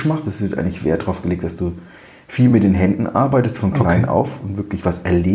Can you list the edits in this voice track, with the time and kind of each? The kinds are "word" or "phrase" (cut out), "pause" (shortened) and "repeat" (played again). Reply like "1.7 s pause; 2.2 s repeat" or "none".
none